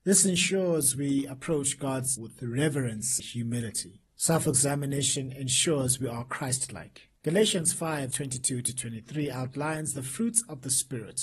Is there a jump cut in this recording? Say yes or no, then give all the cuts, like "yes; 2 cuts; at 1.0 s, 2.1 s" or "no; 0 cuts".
yes; 5 cuts; at 2.2 s, 3.2 s, 4.1 s, 7.2 s, 8.1 s